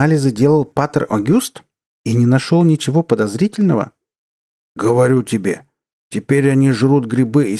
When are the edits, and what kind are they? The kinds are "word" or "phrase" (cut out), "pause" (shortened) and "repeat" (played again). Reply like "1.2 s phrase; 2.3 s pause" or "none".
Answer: none